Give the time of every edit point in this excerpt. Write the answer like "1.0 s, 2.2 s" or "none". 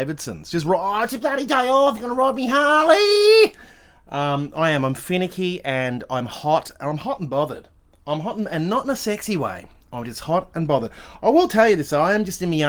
none